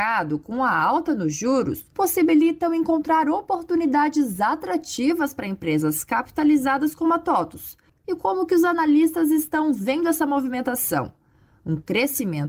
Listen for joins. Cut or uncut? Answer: uncut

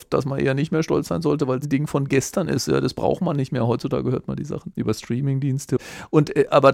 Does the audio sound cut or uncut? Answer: cut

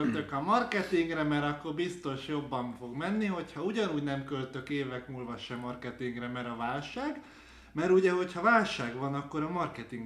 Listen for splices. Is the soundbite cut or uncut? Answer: uncut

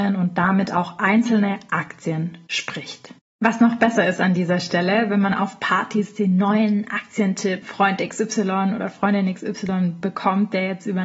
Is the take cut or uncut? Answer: cut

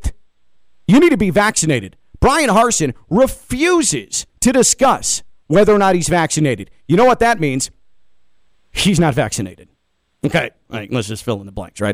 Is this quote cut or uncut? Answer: uncut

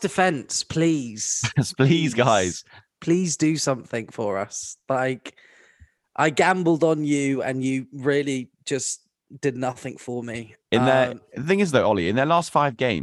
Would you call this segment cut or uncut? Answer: uncut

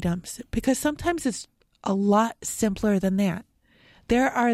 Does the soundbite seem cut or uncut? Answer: uncut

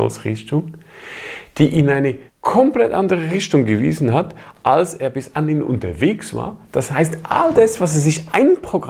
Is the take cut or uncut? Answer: cut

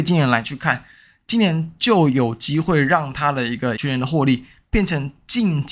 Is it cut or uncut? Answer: cut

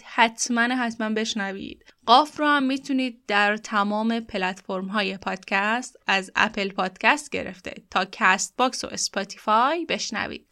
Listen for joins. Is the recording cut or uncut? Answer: uncut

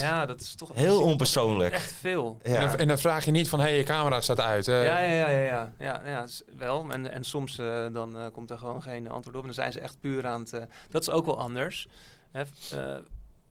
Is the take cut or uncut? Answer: uncut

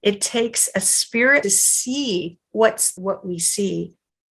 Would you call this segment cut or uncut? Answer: cut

